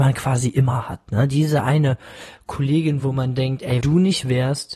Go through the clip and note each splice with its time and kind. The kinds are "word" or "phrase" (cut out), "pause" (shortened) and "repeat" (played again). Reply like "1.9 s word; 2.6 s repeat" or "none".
3.8 s word